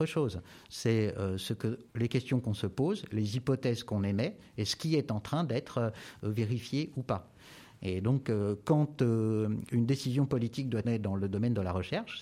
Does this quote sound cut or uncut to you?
cut